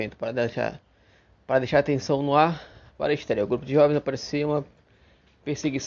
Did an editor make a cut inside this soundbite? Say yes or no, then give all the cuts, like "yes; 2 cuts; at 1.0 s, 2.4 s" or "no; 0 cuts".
no; 0 cuts